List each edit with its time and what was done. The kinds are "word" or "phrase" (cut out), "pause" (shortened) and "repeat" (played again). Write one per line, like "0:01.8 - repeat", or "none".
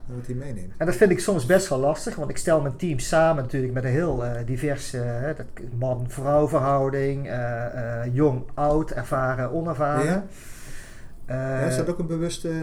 none